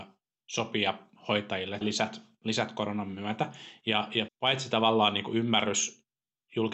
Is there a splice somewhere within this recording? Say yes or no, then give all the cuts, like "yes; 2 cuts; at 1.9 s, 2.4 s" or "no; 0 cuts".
yes; 2 cuts; at 1.8 s, 4.3 s